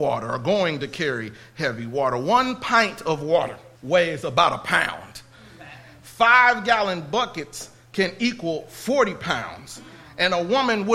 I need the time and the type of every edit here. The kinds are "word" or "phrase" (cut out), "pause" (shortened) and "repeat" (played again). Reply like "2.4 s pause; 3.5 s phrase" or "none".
3.8 s pause